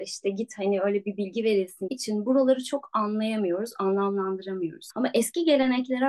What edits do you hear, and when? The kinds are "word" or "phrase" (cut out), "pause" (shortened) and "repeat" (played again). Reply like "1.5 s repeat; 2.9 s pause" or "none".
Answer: 1.9 s phrase